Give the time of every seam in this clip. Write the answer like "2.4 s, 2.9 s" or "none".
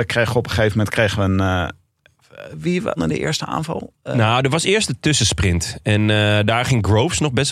3.0 s